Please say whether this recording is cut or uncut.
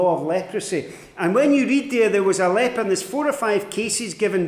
uncut